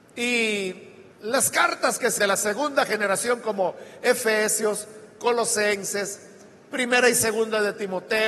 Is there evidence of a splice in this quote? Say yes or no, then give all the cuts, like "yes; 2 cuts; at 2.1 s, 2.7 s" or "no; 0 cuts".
yes; 2 cuts; at 1.1 s, 2.2 s